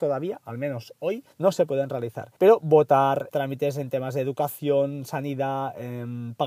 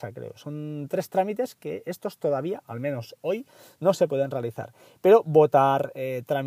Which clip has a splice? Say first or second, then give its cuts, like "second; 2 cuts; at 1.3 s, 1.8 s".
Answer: first; 3 cuts; at 1.3 s, 2.4 s, 3.3 s